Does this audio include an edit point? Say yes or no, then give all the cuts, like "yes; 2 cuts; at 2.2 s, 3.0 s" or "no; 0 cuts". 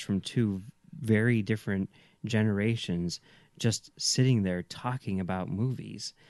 no; 0 cuts